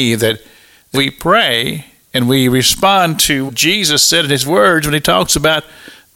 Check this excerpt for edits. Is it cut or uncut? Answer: cut